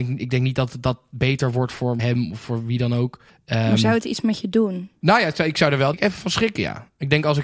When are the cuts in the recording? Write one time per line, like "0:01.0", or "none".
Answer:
0:02.0
0:03.3
0:05.9